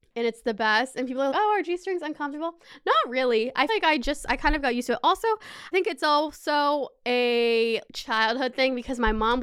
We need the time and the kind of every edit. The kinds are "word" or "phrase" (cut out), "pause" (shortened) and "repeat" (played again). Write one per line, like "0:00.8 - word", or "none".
0:01.3 - word
0:03.7 - word
0:05.7 - word
0:07.9 - word